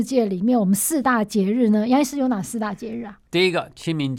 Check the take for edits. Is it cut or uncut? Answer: cut